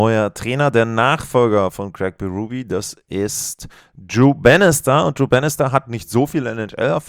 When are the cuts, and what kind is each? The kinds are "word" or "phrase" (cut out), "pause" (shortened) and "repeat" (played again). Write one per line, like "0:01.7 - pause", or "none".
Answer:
none